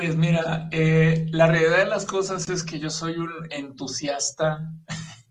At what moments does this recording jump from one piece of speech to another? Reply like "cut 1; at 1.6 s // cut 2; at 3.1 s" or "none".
none

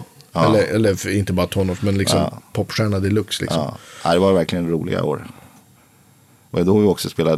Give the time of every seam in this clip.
none

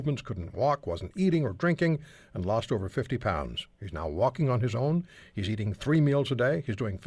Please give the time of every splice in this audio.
cut 1; at 3.7 s

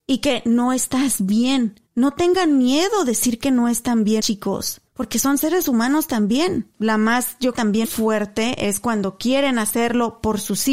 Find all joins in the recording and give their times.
cut 1; at 1.9 s // cut 2; at 4.2 s // cut 3; at 4.9 s // cut 4; at 6.7 s // cut 5; at 7.5 s // cut 6; at 7.8 s

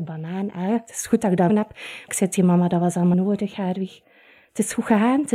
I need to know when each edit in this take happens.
cut 1; at 1.5 s // cut 2; at 2.1 s // cut 3; at 3.1 s

